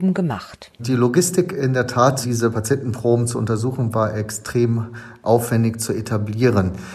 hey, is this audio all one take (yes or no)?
yes